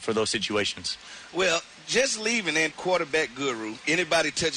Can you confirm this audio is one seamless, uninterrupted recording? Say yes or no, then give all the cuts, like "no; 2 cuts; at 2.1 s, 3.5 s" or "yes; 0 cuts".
no; 1 cut; at 2.7 s